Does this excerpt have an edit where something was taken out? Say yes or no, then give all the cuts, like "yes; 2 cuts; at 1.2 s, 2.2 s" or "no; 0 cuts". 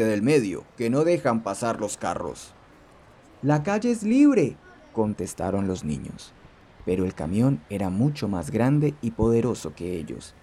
no; 0 cuts